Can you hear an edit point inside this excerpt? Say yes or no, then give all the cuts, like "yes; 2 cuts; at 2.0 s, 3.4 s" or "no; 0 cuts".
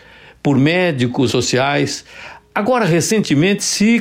yes; 1 cut; at 1.3 s